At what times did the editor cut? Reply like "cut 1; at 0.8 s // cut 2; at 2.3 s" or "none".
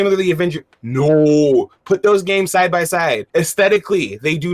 cut 1; at 3.3 s